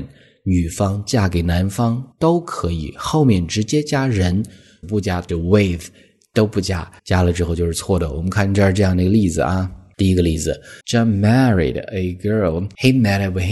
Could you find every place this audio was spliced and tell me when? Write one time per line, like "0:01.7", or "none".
0:02.1
0:04.8
0:05.3
0:07.0
0:10.8